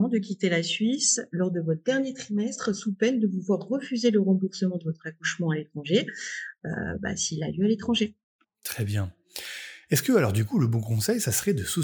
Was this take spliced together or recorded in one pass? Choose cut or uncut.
uncut